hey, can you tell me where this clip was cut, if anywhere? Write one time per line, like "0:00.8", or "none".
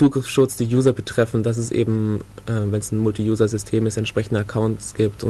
none